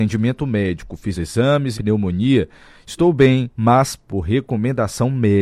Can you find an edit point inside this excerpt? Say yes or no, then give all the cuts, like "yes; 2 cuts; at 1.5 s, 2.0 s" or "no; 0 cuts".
yes; 3 cuts; at 1.1 s, 1.7 s, 3.5 s